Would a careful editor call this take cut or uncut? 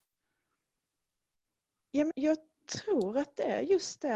cut